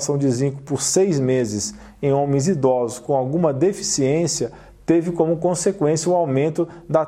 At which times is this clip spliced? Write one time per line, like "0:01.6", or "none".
none